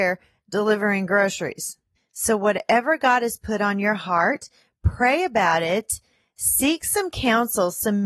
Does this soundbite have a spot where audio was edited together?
no; 0 cuts

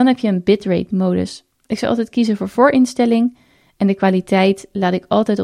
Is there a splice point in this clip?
no; 0 cuts

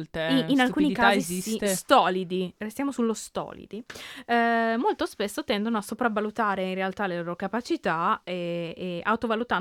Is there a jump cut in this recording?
no; 0 cuts

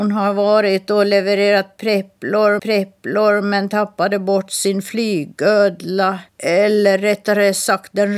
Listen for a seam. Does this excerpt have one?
yes; 2 cuts; at 2.6 s, 6.3 s

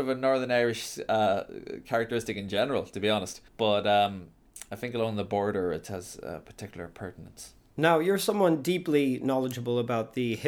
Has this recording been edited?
yes; 1 cut; at 3.5 s

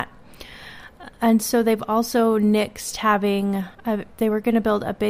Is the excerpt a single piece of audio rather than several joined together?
no; 1 cut; at 3.7 s

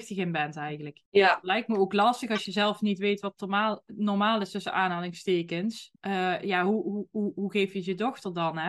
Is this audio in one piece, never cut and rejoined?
no; 2 cuts; at 1.1 s, 6.0 s

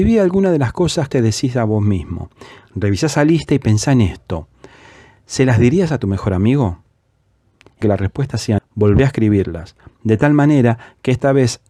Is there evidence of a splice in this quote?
yes; 3 cuts; at 1.1 s, 7.8 s, 8.6 s

